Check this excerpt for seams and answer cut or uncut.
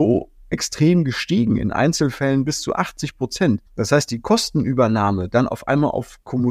cut